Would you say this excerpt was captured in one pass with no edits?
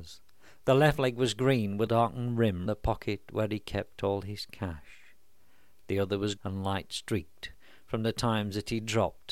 no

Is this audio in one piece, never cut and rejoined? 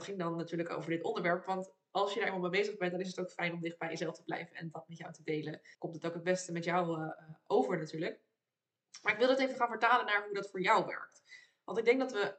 no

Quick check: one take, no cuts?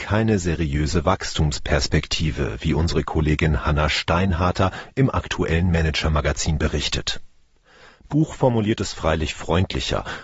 yes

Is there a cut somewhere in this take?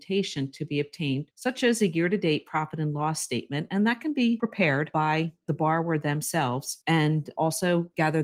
no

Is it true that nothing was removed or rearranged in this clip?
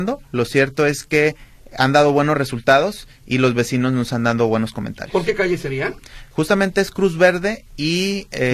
yes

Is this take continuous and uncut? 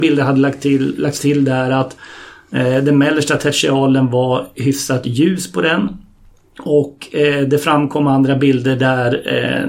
yes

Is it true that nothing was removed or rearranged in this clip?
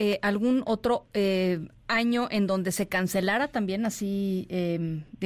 yes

